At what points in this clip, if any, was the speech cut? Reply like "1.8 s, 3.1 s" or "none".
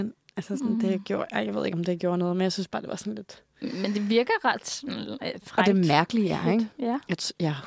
none